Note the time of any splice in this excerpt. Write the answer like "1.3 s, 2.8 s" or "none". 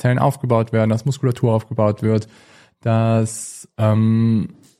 none